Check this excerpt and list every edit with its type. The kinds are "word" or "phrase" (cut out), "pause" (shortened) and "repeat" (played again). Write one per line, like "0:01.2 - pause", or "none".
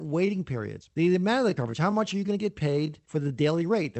none